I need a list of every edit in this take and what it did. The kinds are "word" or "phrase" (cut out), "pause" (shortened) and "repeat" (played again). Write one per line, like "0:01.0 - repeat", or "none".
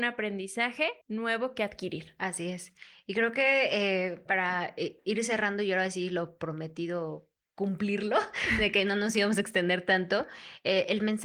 0:01.0 - pause